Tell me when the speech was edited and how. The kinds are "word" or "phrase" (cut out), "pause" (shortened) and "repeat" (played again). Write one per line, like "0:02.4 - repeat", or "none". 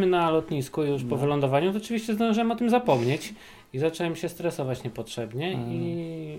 none